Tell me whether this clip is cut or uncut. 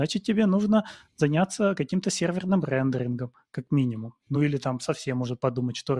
uncut